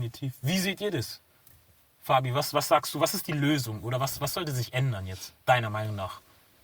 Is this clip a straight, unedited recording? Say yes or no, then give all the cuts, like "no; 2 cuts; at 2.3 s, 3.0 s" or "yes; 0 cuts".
yes; 0 cuts